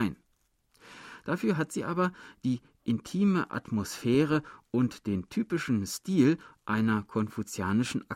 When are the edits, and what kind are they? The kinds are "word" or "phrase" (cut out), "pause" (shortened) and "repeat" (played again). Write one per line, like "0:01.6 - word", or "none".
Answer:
none